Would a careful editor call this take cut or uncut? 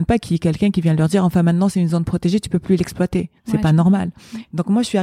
cut